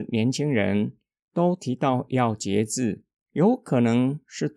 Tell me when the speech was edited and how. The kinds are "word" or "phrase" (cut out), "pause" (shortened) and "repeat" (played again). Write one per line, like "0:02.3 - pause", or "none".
none